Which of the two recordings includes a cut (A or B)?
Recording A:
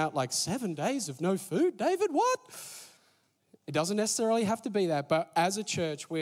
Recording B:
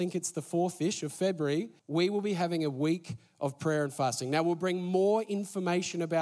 B